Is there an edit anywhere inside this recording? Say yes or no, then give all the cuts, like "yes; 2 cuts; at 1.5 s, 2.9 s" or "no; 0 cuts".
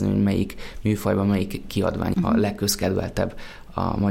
yes; 1 cut; at 2.1 s